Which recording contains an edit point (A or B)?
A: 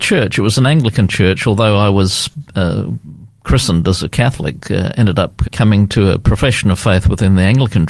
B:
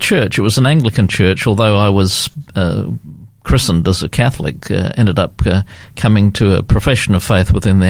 A